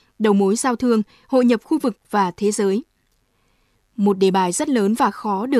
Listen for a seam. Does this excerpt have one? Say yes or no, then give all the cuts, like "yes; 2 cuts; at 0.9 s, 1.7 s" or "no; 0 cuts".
no; 0 cuts